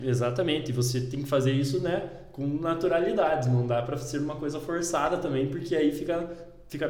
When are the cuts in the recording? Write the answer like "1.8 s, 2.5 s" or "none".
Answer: none